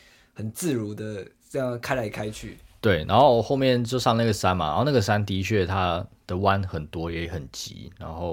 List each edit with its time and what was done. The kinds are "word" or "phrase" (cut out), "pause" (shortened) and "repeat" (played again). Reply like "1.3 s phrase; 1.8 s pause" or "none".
none